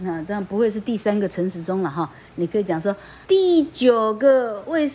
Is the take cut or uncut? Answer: cut